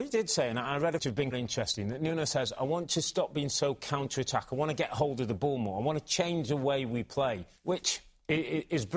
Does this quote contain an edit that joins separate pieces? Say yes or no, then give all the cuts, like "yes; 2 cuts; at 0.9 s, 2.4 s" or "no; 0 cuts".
yes; 3 cuts; at 1.0 s, 1.3 s, 7.6 s